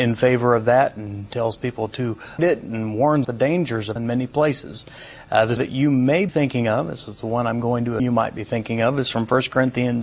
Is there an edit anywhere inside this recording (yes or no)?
yes